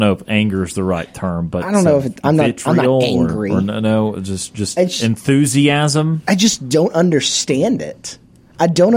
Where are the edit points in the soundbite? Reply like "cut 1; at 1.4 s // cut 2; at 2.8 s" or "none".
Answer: none